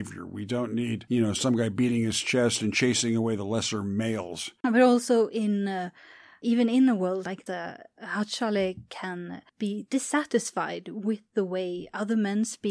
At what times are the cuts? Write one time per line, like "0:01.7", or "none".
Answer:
0:06.4
0:07.5
0:09.5